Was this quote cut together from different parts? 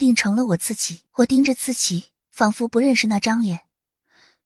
yes; 2 cuts; at 1.1 s, 2.2 s

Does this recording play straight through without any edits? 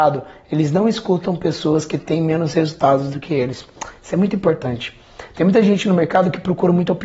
yes; 0 cuts

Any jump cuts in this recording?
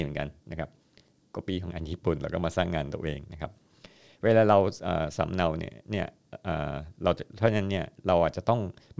no; 0 cuts

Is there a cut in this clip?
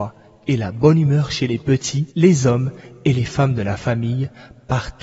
yes; 1 cut; at 2.1 s

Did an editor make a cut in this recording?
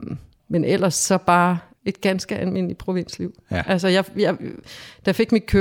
no; 0 cuts

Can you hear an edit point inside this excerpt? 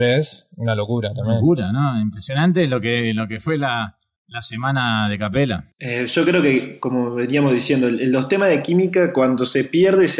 yes; 1 cut; at 5.7 s

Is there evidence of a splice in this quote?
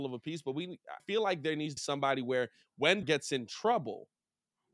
yes; 3 cuts; at 1.0 s, 1.8 s, 3.0 s

